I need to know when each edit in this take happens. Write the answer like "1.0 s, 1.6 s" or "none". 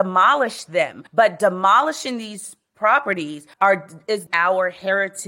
1.1 s, 3.5 s, 4.3 s